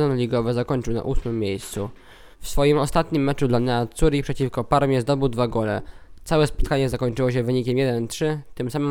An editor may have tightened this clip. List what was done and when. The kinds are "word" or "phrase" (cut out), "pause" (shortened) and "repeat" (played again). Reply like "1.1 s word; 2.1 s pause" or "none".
2.3 s pause